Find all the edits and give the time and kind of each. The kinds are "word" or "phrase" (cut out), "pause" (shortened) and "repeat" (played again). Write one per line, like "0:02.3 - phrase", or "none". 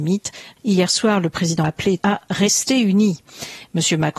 0:01.6 - word
0:02.0 - phrase